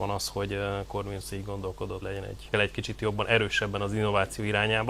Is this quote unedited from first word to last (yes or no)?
no